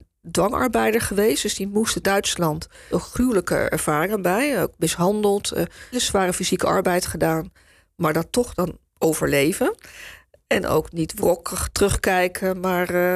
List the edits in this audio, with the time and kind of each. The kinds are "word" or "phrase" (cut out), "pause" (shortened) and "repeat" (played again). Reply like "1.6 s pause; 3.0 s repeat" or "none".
2.0 s phrase; 2.9 s word; 5.9 s word; 8.9 s pause; 10.9 s word

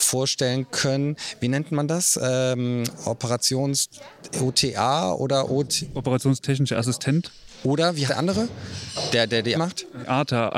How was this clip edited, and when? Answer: 8.1 s word; 9.5 s word

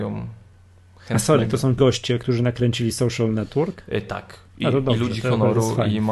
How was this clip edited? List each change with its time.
1.8 s word; 4.5 s pause

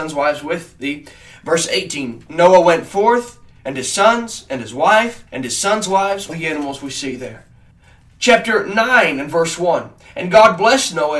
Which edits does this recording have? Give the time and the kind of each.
5.3 s pause; 6.3 s phrase; 7.7 s pause

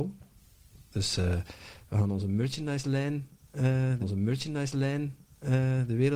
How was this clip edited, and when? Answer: 4.0 s repeat

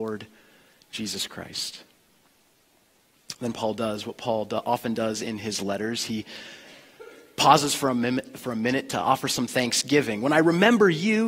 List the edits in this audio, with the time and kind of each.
none

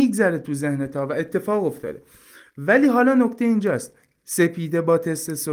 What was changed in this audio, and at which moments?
4.2 s word

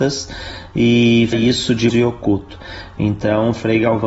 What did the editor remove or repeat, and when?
1.3 s word; 1.9 s phrase

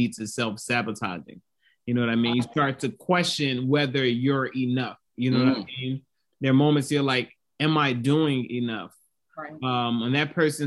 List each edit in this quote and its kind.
5.1 s pause

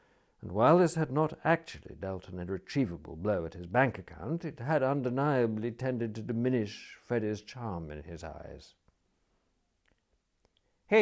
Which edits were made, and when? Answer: none

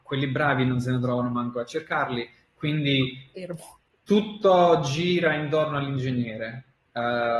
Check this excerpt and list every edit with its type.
none

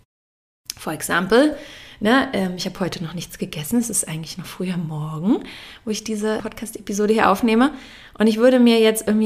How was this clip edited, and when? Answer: 6.4 s word

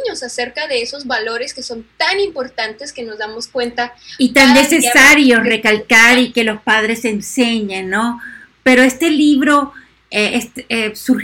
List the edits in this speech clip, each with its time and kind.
none

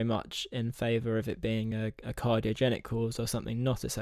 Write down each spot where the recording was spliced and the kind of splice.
none

